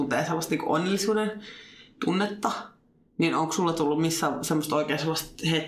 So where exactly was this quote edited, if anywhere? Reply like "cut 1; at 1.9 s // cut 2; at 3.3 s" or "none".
none

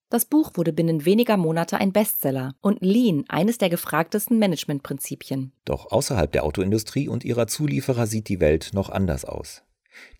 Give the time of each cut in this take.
cut 1; at 2.6 s // cut 2; at 5.6 s

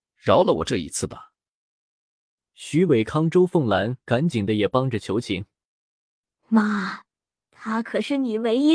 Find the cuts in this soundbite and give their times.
cut 1; at 7.4 s

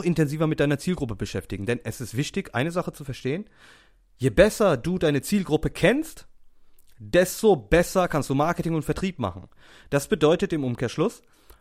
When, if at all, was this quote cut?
none

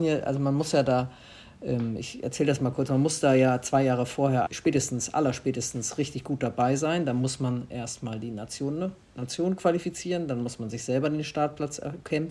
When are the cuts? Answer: cut 1; at 4.5 s

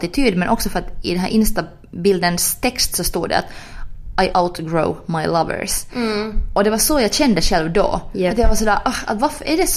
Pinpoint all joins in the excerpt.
cut 1; at 4.3 s

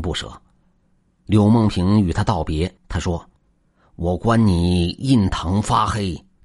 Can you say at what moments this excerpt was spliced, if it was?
cut 1; at 2.8 s // cut 2; at 3.4 s

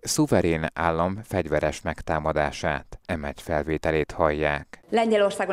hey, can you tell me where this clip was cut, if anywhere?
cut 1; at 3.0 s

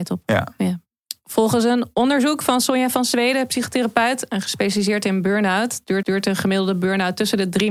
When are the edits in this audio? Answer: cut 1; at 6.0 s

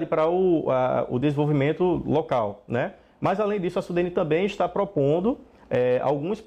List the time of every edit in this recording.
none

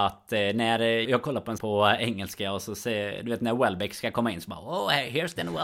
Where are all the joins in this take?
cut 1; at 1.0 s // cut 2; at 1.6 s

